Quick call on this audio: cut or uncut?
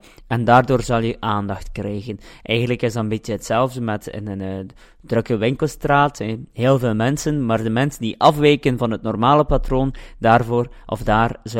uncut